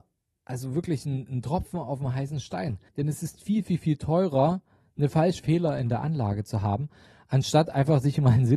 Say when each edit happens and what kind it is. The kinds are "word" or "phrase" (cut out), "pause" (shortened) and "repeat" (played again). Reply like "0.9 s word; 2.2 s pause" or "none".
2.9 s pause; 5.4 s phrase